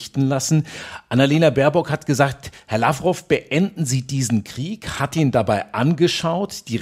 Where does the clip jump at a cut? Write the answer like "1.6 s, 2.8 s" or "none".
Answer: none